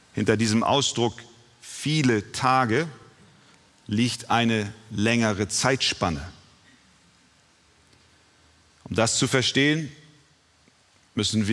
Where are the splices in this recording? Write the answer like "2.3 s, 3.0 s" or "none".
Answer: none